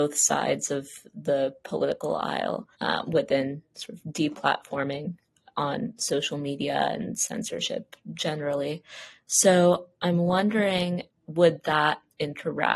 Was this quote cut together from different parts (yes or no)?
yes